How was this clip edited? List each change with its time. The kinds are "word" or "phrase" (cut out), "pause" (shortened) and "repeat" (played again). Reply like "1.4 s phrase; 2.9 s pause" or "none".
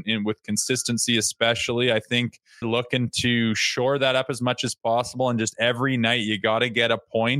2.6 s word